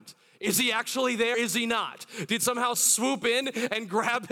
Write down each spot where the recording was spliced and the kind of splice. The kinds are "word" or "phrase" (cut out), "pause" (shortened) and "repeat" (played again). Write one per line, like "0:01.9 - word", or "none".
0:01.3 - word
0:02.7 - word